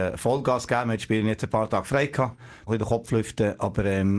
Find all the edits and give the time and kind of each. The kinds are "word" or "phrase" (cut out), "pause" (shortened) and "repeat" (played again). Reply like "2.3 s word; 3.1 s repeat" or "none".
2.7 s word

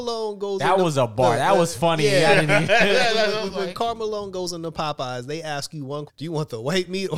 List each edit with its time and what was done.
6.1 s word

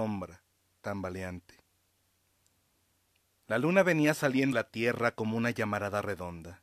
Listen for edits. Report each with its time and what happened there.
4.5 s word

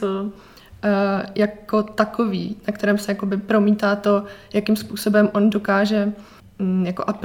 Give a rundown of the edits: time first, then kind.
none

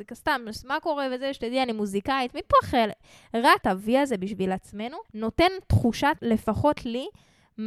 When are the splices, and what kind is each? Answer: 3.6 s phrase; 5.1 s pause; 6.2 s word

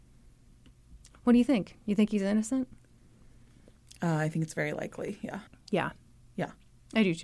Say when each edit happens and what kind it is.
5.5 s pause

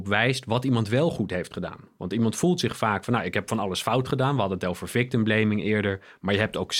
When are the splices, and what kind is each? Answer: none

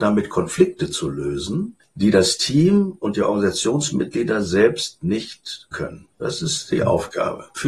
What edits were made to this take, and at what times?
5.7 s word; 6.1 s pause

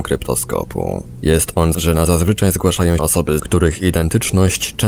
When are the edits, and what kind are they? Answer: 1.7 s word; 2.1 s word; 3.0 s word; 3.4 s word

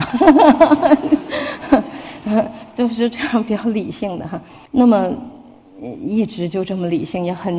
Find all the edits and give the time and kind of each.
4.7 s pause

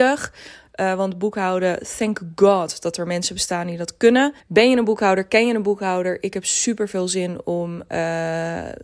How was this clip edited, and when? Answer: 4.4 s pause

